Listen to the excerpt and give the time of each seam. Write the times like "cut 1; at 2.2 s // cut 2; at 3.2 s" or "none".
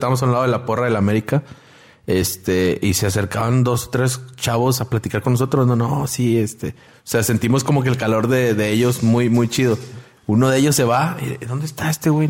none